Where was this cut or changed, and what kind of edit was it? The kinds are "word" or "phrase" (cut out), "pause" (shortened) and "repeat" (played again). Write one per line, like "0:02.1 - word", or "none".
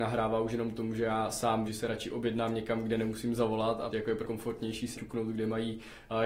0:01.7 - word
0:03.9 - word
0:04.2 - word
0:04.9 - word